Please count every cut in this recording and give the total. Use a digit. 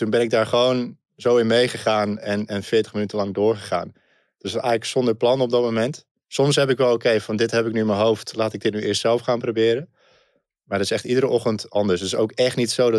0